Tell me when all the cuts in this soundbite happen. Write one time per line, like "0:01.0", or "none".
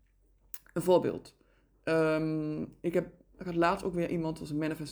none